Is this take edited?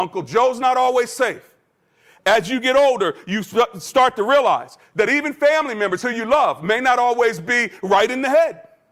no; 0 cuts

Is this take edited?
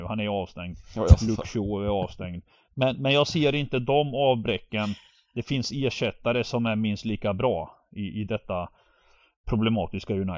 no; 0 cuts

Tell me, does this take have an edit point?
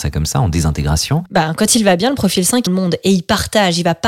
yes; 1 cut; at 2.7 s

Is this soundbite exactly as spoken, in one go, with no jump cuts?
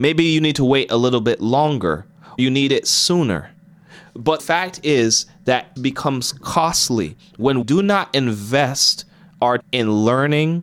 no; 5 cuts; at 2.4 s, 4.4 s, 5.8 s, 7.6 s, 9.6 s

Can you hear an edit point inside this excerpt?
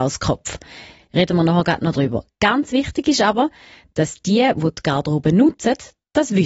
no; 0 cuts

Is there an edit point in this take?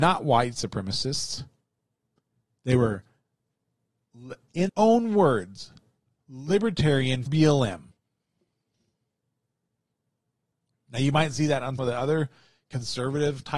yes; 3 cuts; at 4.7 s, 7.3 s, 11.8 s

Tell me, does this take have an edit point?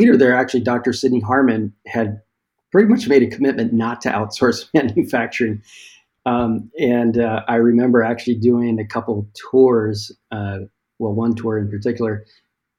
no; 0 cuts

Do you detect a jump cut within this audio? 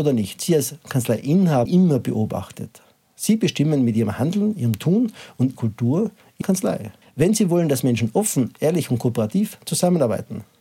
yes; 4 cuts; at 1.7 s, 5.5 s, 6.4 s, 7.0 s

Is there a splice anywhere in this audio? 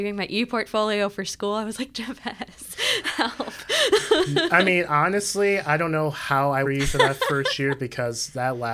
yes; 1 cut; at 6.6 s

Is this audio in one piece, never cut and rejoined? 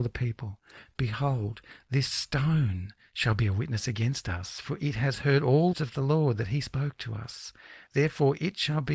no; 1 cut; at 5.7 s

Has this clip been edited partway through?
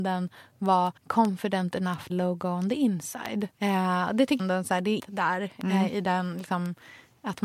yes; 5 cuts; at 1.0 s, 2.1 s, 3.5 s, 4.4 s, 5.0 s

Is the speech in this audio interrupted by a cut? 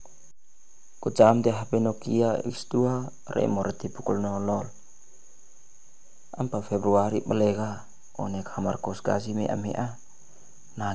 no; 0 cuts

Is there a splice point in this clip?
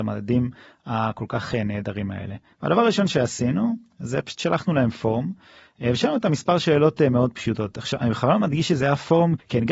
no; 0 cuts

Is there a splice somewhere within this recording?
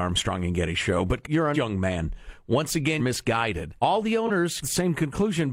yes; 5 cuts; at 1.2 s, 1.5 s, 3.0 s, 3.8 s, 4.6 s

